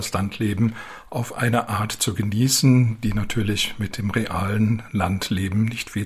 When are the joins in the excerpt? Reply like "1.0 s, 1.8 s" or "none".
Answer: none

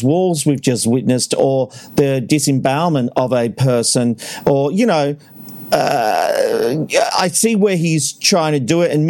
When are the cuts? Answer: none

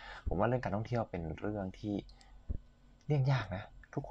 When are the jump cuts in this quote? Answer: none

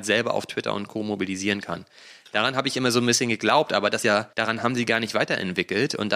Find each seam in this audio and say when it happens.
4.0 s, 4.3 s

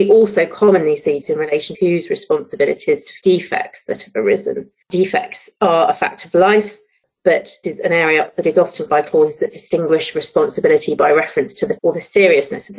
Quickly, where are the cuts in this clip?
1.2 s, 1.7 s, 2.9 s, 3.2 s, 4.8 s, 7.6 s, 8.9 s, 11.8 s

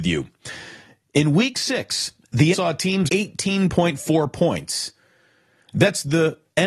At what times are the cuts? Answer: 2.5 s, 3.1 s

